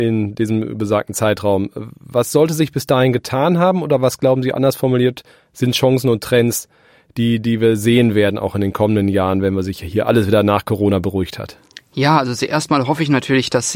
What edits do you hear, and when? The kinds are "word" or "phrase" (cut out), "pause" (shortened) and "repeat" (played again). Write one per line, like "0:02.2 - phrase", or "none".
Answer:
none